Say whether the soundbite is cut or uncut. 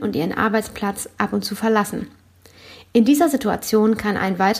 uncut